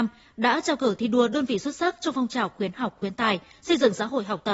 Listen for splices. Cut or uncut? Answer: uncut